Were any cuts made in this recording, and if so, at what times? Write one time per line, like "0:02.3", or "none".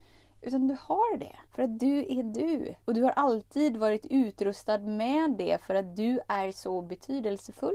0:01.5
0:02.8